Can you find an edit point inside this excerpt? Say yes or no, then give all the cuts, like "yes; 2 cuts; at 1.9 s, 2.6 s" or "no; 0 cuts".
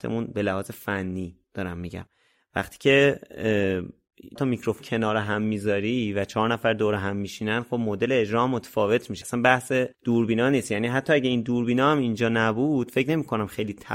yes; 5 cuts; at 1.4 s, 4.4 s, 4.8 s, 9.2 s, 9.9 s